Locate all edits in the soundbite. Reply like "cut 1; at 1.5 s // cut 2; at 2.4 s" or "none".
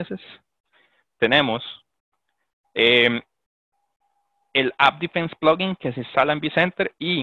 none